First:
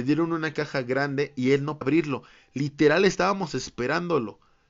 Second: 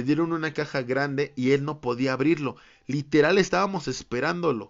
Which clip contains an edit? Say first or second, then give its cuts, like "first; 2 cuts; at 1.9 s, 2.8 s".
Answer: first; 1 cut; at 1.8 s